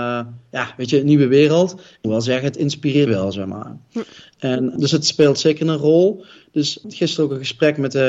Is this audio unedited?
no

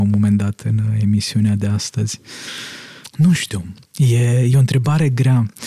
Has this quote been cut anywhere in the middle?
no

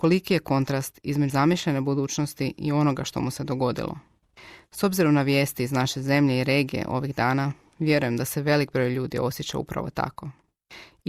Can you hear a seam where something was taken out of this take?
yes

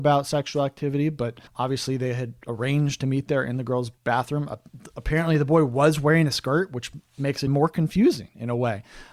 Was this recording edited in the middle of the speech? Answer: yes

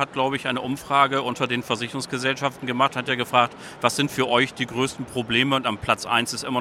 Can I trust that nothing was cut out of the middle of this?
yes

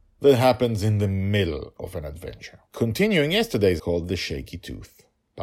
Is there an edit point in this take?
yes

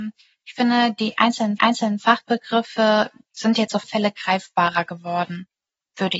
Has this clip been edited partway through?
yes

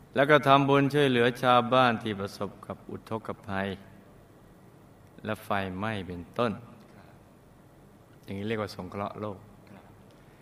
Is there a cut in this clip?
no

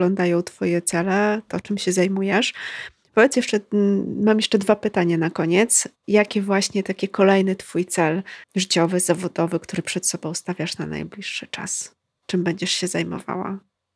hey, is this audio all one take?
no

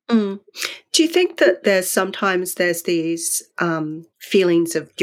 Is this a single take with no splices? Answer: no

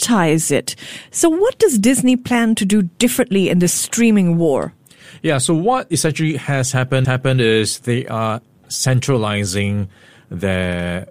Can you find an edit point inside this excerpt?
yes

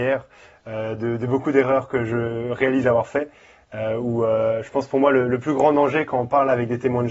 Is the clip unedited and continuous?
yes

